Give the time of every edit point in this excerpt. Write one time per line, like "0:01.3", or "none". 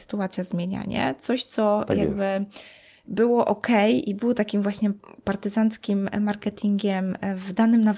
none